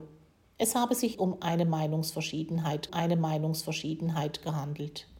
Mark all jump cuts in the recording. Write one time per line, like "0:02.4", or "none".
0:01.1
0:02.9